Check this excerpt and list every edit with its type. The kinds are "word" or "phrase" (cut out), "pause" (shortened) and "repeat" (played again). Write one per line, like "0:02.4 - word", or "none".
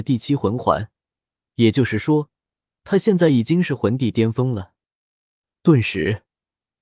none